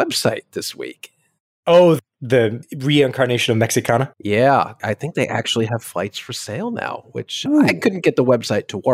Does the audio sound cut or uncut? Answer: uncut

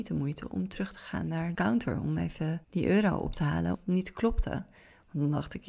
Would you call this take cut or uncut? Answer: cut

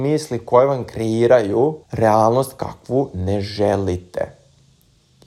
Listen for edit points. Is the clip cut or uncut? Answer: cut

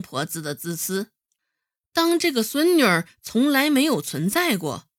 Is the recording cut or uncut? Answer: uncut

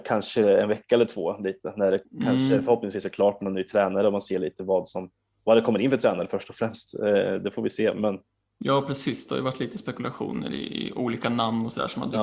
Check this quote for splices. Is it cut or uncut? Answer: cut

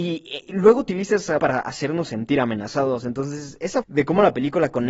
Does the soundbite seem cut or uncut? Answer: cut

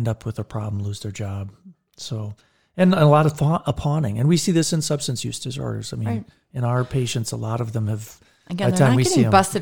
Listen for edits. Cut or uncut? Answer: uncut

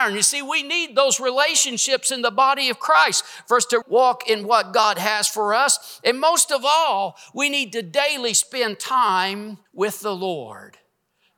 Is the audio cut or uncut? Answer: cut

